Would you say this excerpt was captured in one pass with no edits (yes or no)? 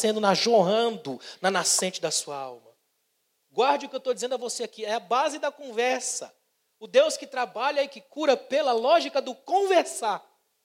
yes